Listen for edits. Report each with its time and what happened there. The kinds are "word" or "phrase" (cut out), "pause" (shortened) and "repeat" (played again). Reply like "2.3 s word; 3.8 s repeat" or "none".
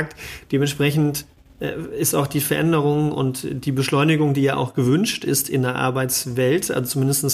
none